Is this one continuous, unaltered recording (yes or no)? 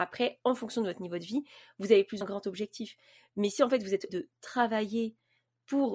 no